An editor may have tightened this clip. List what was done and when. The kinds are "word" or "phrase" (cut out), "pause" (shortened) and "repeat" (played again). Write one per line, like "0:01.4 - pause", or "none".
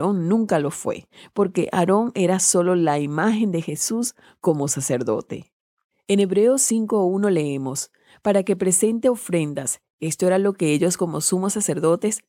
0:04.7 - word